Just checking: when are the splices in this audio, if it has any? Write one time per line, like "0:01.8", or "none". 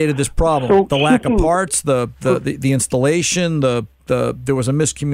none

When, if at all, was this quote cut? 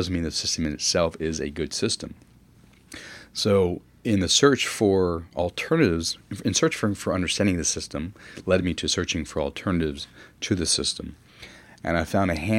none

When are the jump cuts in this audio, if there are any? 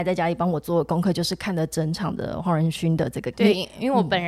0:03.3

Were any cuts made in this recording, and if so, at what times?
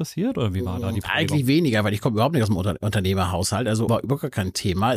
0:03.9

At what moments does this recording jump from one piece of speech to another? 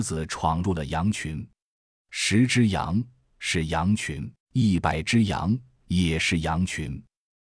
0:04.4

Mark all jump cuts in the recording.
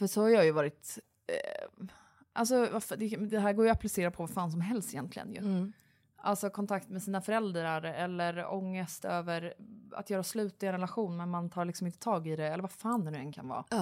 none

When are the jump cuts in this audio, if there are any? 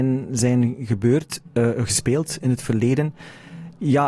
none

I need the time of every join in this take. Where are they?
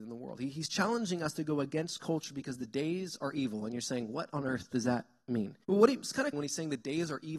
0:05.6
0:06.3

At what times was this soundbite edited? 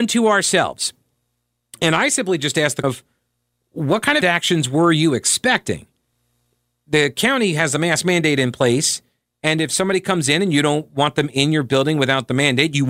0:02.8
0:04.2

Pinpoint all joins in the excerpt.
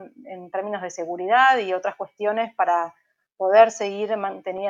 none

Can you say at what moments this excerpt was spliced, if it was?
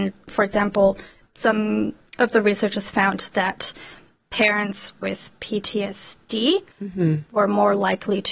0:06.7

